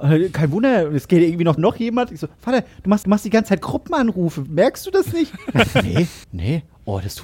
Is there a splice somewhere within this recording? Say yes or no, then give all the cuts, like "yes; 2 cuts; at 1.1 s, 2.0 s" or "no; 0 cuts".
yes; 3 cuts; at 1.6 s, 3.0 s, 6.2 s